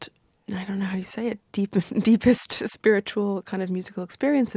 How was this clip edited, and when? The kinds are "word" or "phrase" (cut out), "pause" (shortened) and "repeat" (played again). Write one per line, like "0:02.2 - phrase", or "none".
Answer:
none